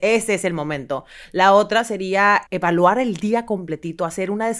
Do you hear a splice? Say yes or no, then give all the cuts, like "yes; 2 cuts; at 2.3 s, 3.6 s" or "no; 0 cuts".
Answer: yes; 1 cut; at 2.5 s